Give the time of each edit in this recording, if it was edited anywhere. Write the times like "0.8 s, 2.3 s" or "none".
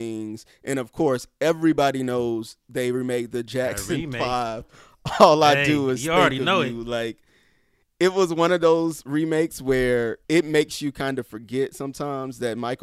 10.2 s